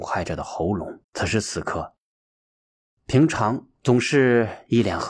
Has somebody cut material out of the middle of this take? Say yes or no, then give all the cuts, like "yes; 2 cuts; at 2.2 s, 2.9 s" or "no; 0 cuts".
yes; 1 cut; at 1.0 s